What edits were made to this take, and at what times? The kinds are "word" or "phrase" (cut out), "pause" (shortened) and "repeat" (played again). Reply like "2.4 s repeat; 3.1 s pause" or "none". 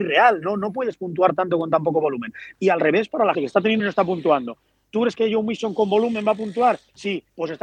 3.3 s word; 3.8 s word; 5.1 s word